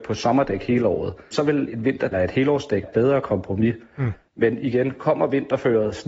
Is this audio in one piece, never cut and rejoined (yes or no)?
no